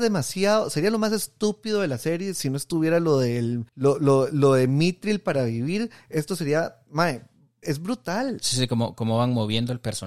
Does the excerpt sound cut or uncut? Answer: cut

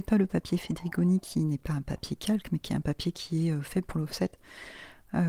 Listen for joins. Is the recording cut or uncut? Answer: uncut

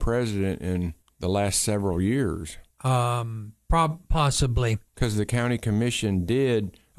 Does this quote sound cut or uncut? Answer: cut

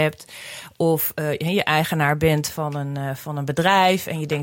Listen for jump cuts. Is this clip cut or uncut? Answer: uncut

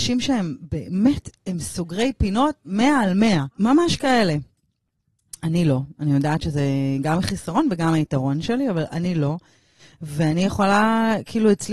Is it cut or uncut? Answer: cut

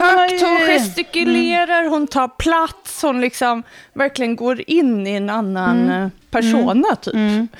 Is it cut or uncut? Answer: cut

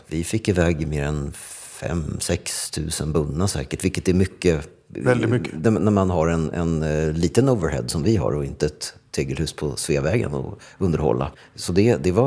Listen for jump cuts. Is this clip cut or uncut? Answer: uncut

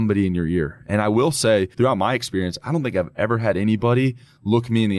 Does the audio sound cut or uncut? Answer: cut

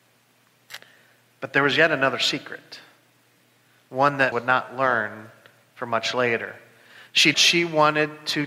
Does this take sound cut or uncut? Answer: cut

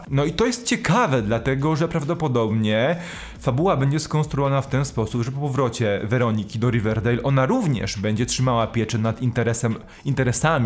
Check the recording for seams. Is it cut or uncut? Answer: uncut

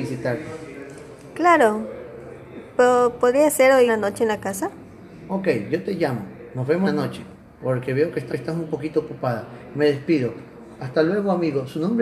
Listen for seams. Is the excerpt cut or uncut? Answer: cut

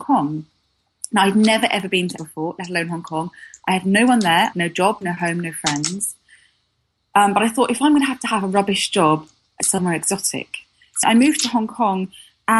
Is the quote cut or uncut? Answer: cut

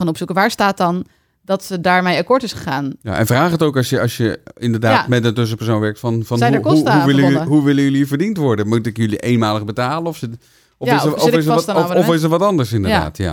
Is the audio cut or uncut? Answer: uncut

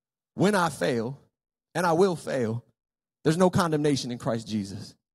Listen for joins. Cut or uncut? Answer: uncut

